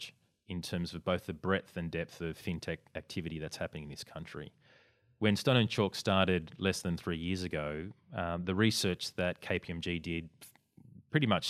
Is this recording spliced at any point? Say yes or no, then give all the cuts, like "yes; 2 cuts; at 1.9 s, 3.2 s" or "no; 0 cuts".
no; 0 cuts